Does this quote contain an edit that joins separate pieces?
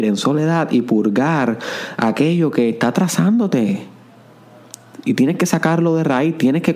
no; 0 cuts

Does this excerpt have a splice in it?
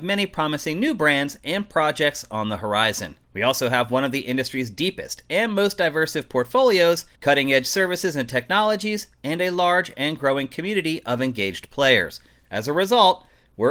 yes; 2 cuts; at 3.2 s, 7.2 s

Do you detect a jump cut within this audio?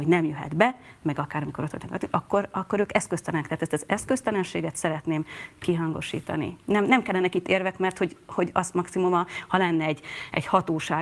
no; 0 cuts

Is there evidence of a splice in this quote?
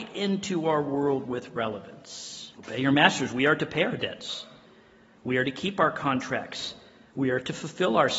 yes; 1 cut; at 2.5 s

